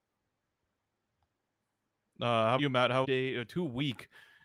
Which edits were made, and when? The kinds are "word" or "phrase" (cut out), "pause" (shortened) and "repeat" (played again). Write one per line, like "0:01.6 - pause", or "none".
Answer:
0:02.6 - word
0:03.0 - phrase